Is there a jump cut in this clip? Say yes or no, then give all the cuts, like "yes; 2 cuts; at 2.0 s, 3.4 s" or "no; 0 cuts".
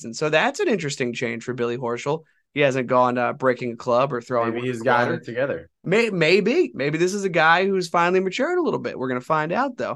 yes; 1 cut; at 5.8 s